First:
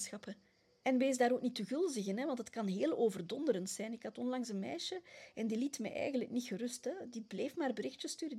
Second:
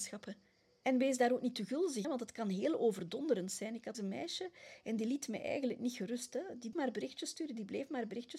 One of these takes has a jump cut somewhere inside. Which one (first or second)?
second